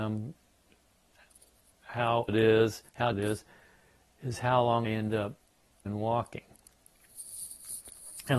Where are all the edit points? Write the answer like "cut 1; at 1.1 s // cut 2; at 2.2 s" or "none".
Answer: cut 1; at 2.3 s // cut 2; at 3.1 s // cut 3; at 4.8 s // cut 4; at 5.9 s